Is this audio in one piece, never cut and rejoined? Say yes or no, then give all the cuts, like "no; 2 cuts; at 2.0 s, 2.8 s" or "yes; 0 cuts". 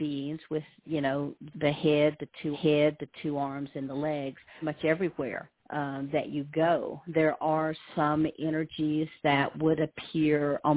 no; 4 cuts; at 1.5 s, 2.5 s, 4.6 s, 5.6 s